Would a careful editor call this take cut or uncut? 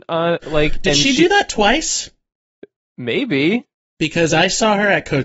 uncut